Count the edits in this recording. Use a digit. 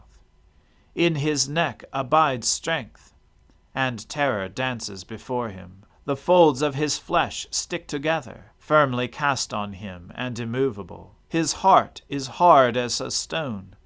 3